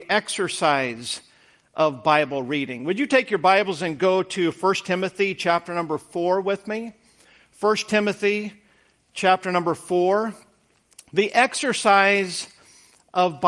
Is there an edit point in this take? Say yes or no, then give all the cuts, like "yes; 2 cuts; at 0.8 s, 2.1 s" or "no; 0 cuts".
no; 0 cuts